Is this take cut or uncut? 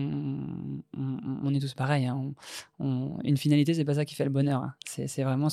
uncut